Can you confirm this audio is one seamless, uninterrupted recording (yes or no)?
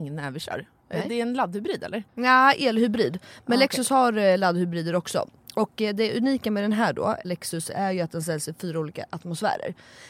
no